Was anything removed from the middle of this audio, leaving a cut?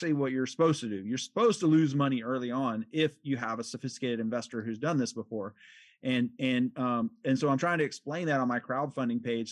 no; 0 cuts

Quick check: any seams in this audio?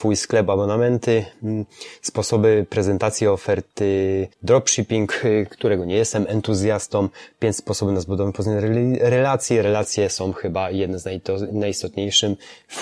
yes; 1 cut; at 4.3 s

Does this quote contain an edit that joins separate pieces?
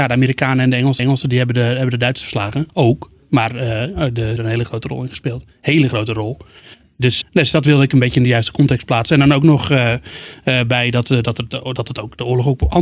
yes; 4 cuts; at 1.0 s, 2.7 s, 4.4 s, 7.2 s

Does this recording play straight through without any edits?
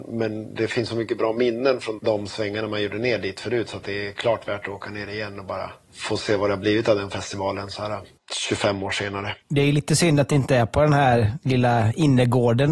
no; 2 cuts; at 2.0 s, 9.4 s

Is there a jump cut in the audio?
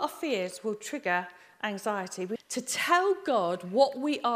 yes; 1 cut; at 2.4 s

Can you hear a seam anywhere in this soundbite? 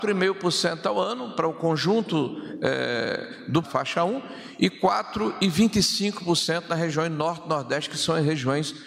yes; 1 cut; at 3.6 s

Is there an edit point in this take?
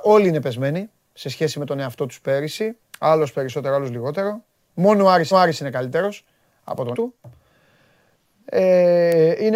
yes; 3 cuts; at 2.9 s, 5.3 s, 6.9 s

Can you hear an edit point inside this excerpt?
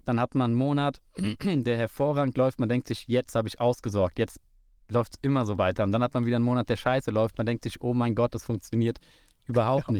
no; 0 cuts

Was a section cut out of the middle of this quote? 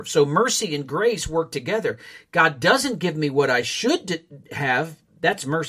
no; 0 cuts

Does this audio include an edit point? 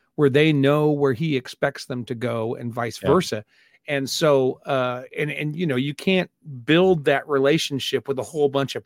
no; 0 cuts

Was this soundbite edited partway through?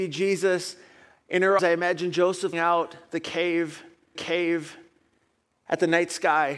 yes; 3 cuts; at 1.6 s, 2.5 s, 4.1 s

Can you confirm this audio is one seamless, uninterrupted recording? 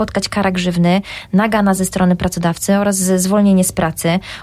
yes; 0 cuts

